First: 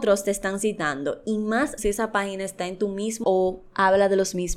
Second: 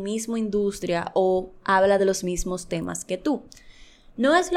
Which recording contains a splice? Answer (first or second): first